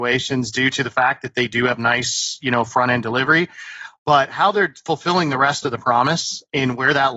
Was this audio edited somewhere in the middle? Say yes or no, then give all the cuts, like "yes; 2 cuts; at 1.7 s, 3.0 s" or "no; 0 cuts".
no; 0 cuts